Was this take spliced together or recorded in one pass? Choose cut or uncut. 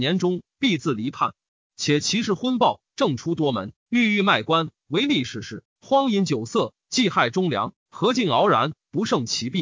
uncut